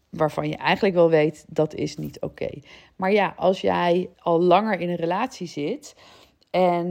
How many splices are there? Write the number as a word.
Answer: one